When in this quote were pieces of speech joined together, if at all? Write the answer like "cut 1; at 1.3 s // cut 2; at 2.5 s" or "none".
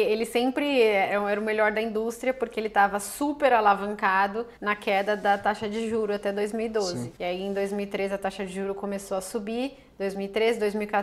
cut 1; at 4.6 s // cut 2; at 7.2 s